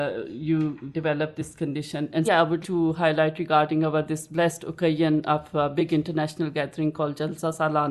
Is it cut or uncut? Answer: cut